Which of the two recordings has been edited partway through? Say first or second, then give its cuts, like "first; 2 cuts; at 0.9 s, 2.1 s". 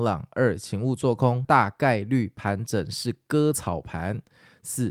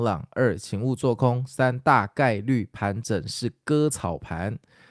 first; 1 cut; at 1.4 s